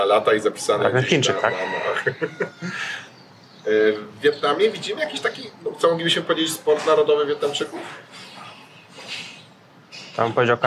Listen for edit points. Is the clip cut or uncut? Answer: uncut